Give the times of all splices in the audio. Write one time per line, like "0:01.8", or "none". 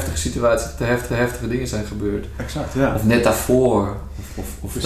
0:01.1